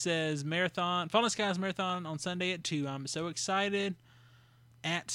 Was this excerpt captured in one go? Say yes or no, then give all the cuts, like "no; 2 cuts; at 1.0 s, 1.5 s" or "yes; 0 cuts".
yes; 0 cuts